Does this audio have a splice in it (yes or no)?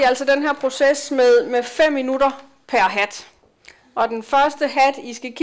no